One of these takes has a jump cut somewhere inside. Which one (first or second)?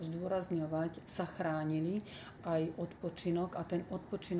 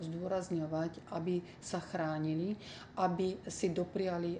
first